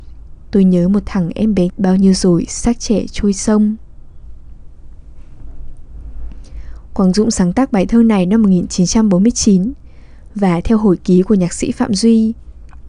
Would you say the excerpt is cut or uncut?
cut